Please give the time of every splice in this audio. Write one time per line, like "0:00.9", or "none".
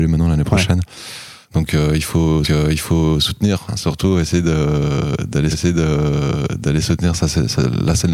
0:01.4
0:02.4
0:05.5